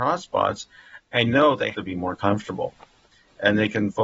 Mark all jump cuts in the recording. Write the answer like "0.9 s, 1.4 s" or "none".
1.3 s, 1.7 s